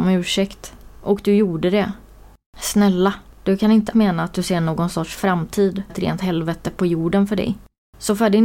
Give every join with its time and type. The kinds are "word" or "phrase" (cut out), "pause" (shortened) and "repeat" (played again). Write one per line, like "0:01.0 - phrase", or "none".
0:03.9 - word
0:05.9 - phrase